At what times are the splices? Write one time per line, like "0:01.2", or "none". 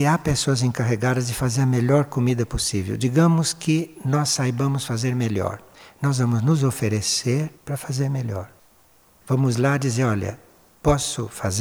0:07.6